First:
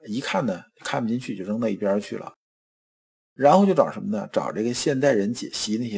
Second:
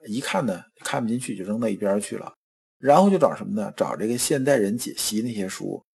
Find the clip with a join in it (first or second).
second